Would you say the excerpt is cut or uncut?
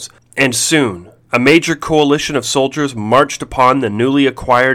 uncut